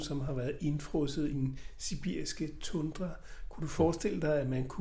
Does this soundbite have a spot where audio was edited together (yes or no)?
yes